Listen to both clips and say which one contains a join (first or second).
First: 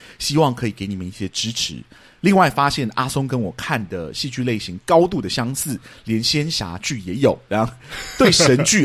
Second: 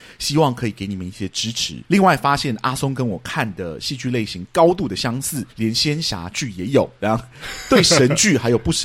second